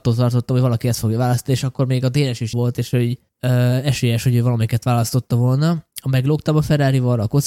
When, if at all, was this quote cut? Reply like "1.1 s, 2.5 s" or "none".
2.5 s